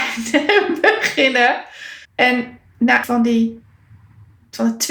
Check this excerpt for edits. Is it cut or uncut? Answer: cut